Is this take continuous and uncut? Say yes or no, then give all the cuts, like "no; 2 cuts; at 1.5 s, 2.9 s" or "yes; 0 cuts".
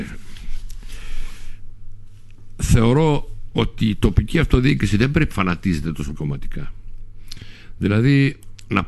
no; 2 cuts; at 5.3 s, 6.1 s